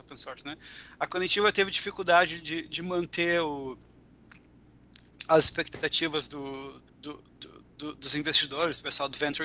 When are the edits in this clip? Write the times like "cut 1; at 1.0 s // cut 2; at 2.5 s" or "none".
cut 1; at 6.9 s